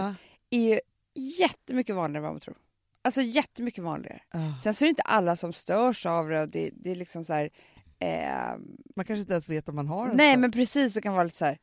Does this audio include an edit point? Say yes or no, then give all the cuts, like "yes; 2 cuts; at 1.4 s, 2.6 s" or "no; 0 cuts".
no; 0 cuts